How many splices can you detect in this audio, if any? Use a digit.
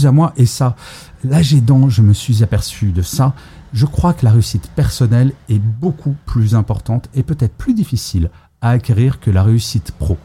0